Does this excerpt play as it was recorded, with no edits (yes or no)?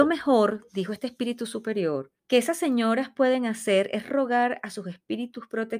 no